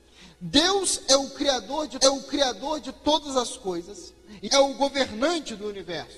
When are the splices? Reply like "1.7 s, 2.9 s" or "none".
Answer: 2.0 s, 4.5 s